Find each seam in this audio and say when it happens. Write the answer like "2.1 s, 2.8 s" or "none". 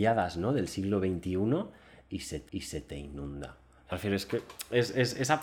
2.5 s, 3.9 s